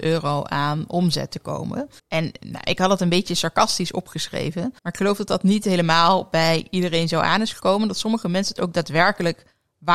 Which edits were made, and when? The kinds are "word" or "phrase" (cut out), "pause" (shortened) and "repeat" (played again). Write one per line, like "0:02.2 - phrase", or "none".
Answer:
0:02.0 - pause
0:04.8 - pause